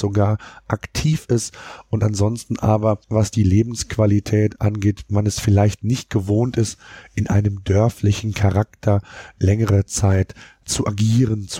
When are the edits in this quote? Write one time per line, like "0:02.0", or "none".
0:03.0